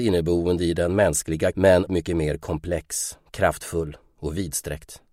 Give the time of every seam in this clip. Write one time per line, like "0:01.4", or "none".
0:01.5
0:01.9